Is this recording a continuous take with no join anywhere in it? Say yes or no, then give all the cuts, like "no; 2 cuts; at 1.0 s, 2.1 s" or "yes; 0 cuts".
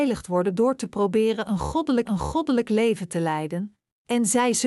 no; 1 cut; at 2.0 s